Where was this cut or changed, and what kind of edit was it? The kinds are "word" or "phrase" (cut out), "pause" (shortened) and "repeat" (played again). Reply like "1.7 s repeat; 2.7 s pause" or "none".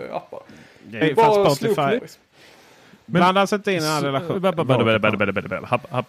1.0 s word; 2.0 s word